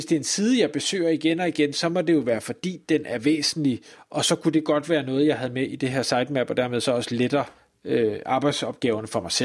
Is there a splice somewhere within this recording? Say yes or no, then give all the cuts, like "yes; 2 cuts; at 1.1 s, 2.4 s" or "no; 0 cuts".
no; 0 cuts